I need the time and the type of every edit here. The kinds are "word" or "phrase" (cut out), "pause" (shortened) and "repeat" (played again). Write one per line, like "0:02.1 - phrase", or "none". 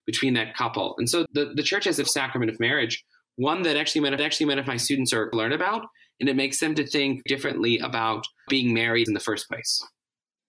0:01.3 - word
0:02.0 - phrase
0:04.2 - repeat
0:05.3 - phrase
0:07.3 - word
0:08.5 - word
0:09.1 - word